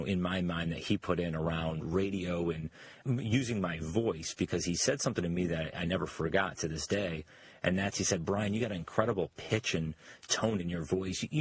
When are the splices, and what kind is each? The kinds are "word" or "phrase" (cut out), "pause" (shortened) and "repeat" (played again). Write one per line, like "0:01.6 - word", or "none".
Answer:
0:03.0 - word